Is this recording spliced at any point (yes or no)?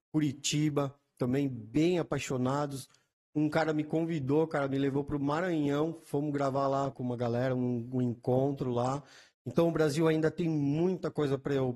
yes